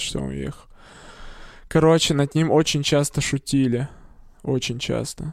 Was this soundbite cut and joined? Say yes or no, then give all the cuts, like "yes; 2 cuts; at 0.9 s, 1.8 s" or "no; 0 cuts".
no; 0 cuts